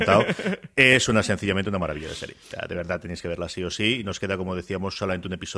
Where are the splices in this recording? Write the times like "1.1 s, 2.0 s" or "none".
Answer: none

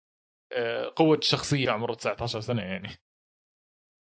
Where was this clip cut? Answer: 1.7 s

